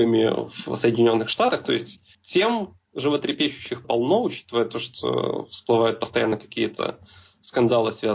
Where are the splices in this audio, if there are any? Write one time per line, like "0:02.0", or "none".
0:02.1
0:03.8